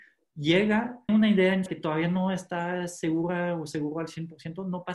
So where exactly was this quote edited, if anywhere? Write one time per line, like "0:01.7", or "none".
0:01.1
0:01.7